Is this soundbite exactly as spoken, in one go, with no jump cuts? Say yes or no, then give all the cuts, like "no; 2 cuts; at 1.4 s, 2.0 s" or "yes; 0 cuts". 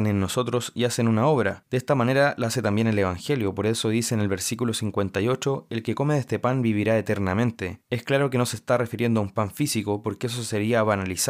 yes; 0 cuts